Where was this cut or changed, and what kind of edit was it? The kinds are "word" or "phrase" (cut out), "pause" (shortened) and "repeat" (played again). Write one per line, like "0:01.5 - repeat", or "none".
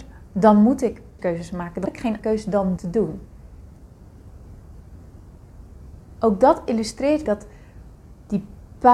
0:01.2 - word
0:01.8 - word
0:02.2 - word
0:02.8 - word
0:07.2 - word